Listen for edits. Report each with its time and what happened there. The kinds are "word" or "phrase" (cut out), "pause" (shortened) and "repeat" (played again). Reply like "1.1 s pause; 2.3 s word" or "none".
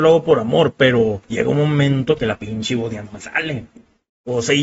1.2 s pause